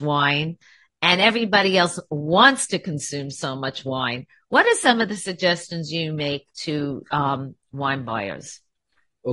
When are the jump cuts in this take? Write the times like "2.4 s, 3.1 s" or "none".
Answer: none